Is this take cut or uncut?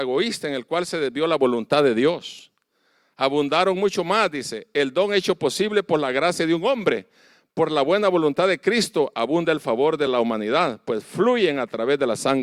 uncut